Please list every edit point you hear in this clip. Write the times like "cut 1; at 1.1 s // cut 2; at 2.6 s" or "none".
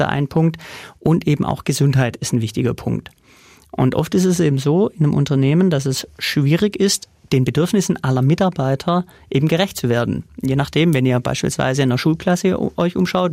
none

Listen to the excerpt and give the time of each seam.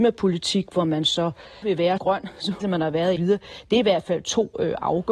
cut 1; at 1.6 s // cut 2; at 2.0 s // cut 3; at 2.6 s // cut 4; at 3.2 s

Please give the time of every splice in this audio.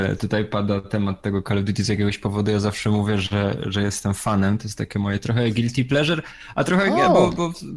none

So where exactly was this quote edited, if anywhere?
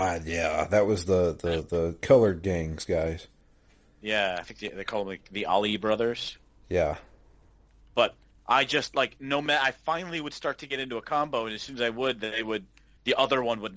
none

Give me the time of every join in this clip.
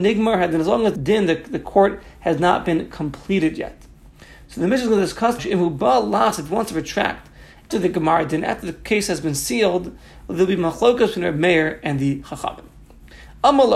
cut 1; at 1.0 s // cut 2; at 5.4 s // cut 3; at 7.7 s

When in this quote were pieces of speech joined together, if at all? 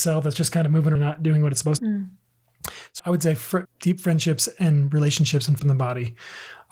cut 1; at 1.0 s // cut 2; at 1.8 s // cut 3; at 3.0 s // cut 4; at 3.6 s // cut 5; at 5.6 s

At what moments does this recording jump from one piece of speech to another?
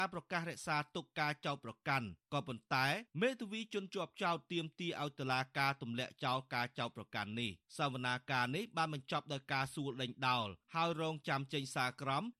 cut 1; at 7.7 s

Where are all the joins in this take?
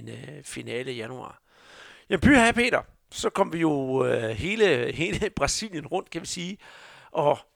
none

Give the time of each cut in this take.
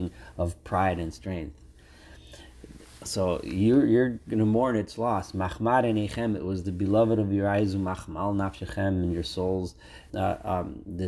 cut 1; at 10.1 s

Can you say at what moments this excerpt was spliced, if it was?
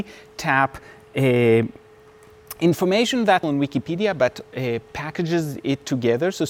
cut 1; at 3.4 s

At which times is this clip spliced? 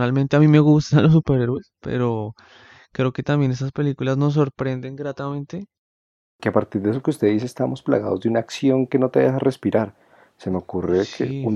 none

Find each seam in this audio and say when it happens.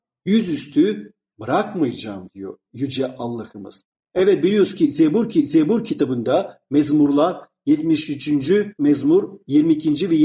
cut 1; at 5.3 s

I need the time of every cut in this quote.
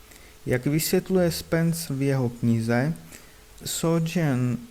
cut 1; at 1.9 s // cut 2; at 3.6 s

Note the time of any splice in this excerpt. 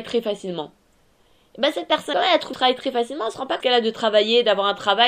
cut 1; at 2.1 s // cut 2; at 2.5 s // cut 3; at 3.6 s

